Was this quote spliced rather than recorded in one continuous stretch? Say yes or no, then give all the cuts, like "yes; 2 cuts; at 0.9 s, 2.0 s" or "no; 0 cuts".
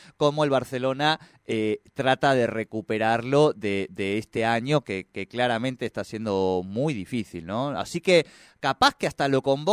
no; 0 cuts